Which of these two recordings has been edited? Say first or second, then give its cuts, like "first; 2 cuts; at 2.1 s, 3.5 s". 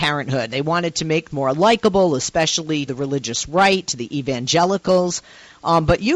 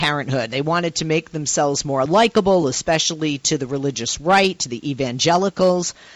first; 2 cuts; at 1.3 s, 2.9 s